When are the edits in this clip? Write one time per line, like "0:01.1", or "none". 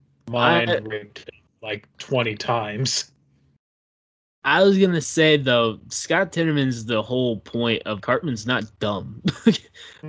0:08.0